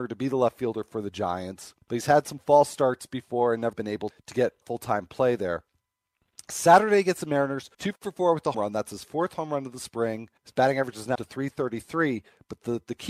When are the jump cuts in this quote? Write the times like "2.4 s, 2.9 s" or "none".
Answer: 1.8 s, 3.7 s, 4.1 s, 4.6 s, 7.7 s, 8.5 s, 10.4 s, 11.1 s